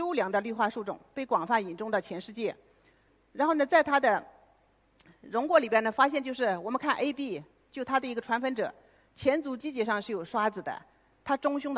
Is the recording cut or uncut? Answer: uncut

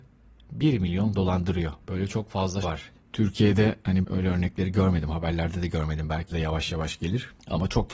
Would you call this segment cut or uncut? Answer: cut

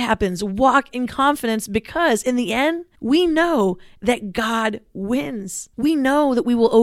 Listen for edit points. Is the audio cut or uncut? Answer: cut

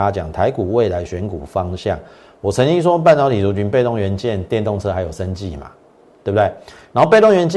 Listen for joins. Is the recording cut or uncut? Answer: uncut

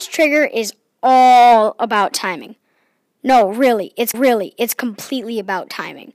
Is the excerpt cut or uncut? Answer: cut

